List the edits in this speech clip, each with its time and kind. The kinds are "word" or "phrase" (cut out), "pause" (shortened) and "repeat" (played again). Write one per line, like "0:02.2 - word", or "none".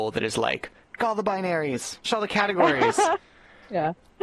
0:01.0 - word
0:02.1 - word